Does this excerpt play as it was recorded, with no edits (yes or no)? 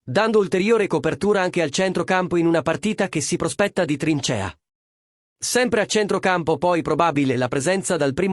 yes